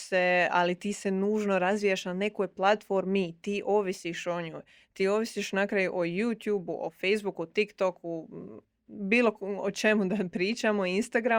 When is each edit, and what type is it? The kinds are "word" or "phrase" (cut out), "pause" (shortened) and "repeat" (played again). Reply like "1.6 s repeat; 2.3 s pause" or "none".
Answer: none